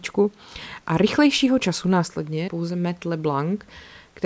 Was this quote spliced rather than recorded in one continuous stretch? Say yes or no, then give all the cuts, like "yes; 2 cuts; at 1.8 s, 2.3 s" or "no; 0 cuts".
yes; 1 cut; at 2.5 s